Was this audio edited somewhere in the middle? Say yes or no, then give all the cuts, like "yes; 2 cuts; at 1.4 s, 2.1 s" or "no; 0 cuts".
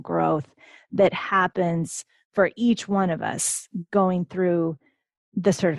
no; 0 cuts